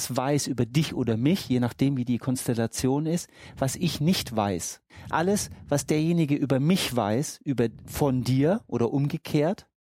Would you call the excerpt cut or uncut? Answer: uncut